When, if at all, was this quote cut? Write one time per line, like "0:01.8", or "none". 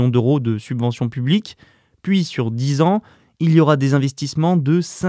none